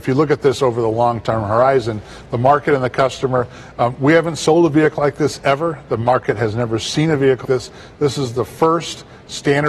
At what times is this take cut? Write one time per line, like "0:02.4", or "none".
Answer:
0:07.4